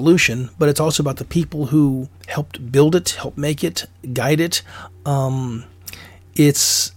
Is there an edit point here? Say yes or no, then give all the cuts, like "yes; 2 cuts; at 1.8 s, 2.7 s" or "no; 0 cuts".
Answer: yes; 1 cut; at 2.2 s